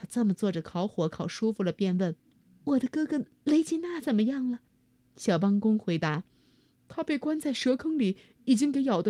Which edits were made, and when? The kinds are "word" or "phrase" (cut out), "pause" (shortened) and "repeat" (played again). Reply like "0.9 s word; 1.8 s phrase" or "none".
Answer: 2.2 s pause; 4.7 s pause; 6.3 s pause